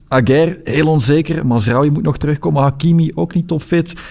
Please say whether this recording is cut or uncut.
uncut